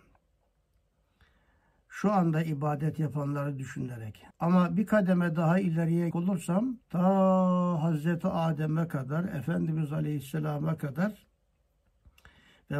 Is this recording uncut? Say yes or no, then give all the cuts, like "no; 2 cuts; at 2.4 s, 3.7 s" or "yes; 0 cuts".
no; 3 cuts; at 4.3 s, 6.1 s, 6.8 s